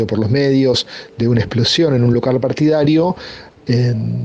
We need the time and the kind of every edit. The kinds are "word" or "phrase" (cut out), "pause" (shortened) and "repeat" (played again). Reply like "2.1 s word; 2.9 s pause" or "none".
none